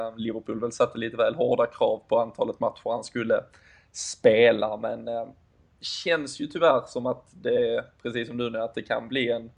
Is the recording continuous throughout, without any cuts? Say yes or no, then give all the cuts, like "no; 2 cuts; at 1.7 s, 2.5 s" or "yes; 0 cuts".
yes; 0 cuts